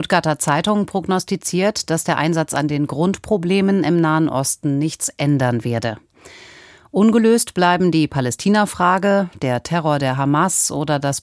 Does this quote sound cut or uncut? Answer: uncut